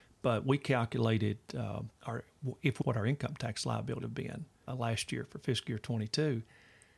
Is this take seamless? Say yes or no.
no